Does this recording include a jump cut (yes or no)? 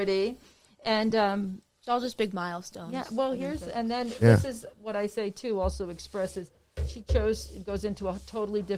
no